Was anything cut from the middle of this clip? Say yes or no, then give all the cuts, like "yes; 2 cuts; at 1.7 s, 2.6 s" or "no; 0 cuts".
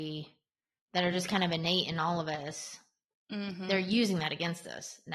no; 0 cuts